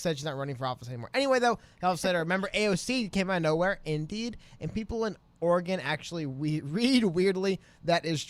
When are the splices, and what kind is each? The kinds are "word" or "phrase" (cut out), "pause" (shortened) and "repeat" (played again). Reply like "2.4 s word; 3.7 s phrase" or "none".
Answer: none